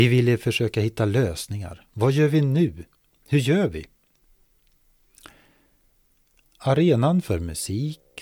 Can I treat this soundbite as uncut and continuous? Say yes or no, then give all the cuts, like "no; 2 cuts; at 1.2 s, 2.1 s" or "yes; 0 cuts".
yes; 0 cuts